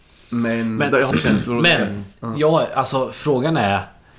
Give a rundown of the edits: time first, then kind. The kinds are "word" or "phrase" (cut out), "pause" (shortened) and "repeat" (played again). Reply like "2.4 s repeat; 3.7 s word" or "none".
1.1 s phrase

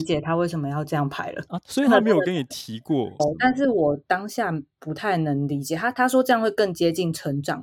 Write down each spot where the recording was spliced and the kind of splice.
3.2 s phrase

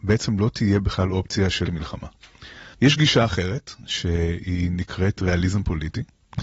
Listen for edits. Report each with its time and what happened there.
1.7 s word; 2.7 s pause

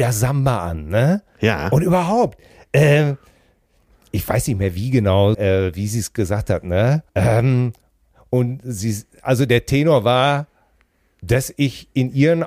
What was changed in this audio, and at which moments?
5.3 s word; 7.1 s pause

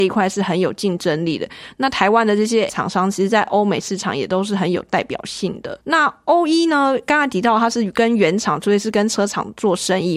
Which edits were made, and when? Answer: 2.7 s word; 5.8 s pause

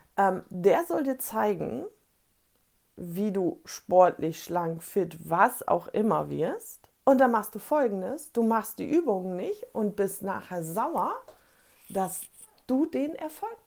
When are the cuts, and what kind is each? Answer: 7.0 s pause

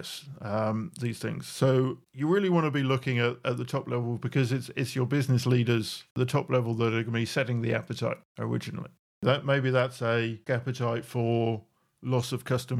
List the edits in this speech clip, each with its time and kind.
6.1 s pause; 10.5 s phrase

